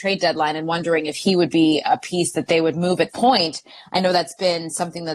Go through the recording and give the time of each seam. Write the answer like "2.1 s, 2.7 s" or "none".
3.1 s